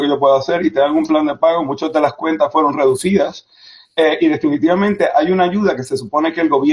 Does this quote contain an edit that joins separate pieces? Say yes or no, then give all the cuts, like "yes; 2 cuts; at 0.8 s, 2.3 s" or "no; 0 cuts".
no; 0 cuts